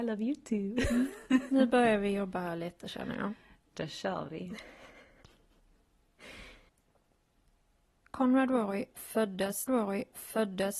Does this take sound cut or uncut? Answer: cut